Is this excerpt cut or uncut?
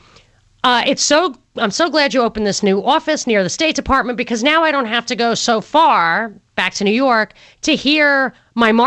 uncut